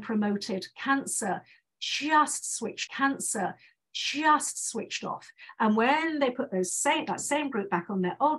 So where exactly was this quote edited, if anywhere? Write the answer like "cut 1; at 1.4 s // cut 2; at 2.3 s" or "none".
cut 1; at 2.9 s